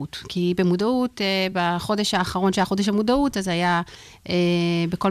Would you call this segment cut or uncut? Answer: uncut